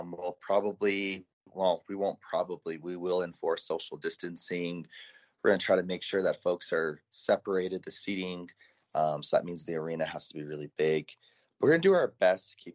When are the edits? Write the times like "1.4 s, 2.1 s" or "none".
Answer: none